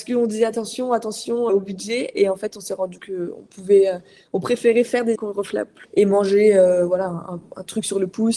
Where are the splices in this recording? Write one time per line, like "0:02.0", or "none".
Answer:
0:01.5
0:03.0
0:05.1
0:05.8